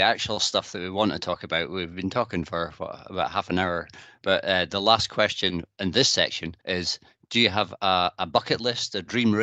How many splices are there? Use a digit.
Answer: 1